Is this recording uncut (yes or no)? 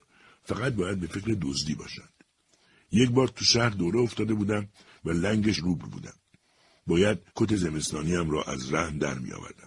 no